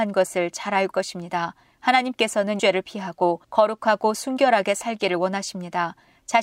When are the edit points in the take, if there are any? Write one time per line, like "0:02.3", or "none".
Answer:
0:00.9
0:02.6